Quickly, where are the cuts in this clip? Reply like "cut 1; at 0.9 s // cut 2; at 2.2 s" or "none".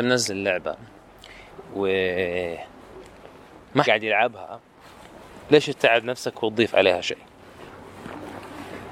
cut 1; at 3.8 s